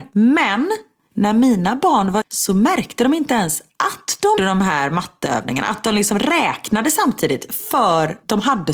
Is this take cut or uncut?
cut